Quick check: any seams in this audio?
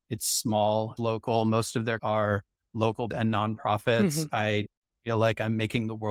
yes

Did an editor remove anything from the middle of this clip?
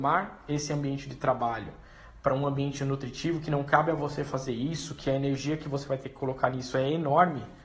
no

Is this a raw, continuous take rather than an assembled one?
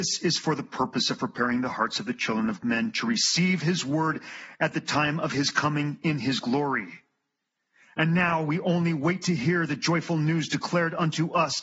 yes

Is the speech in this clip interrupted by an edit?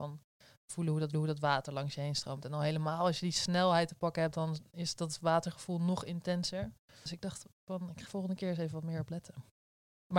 yes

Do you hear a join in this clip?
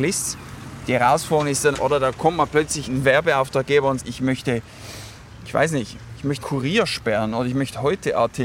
yes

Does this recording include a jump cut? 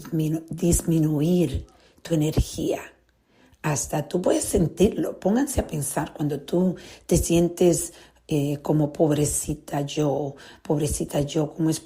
no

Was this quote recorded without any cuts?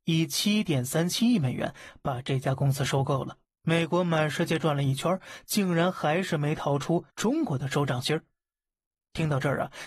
no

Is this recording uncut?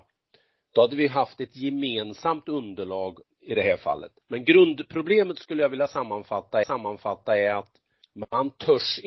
no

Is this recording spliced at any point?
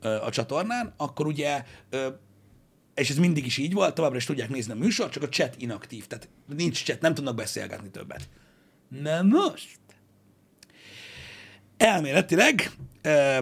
no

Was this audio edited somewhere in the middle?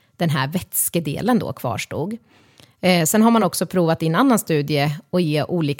no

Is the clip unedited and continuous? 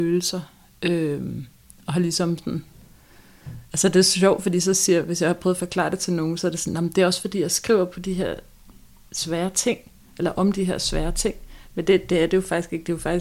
yes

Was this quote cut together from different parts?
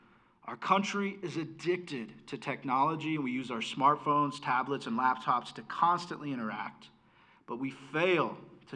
no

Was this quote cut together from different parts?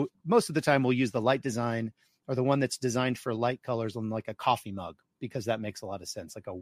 no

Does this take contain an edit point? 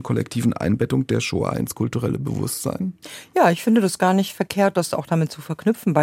no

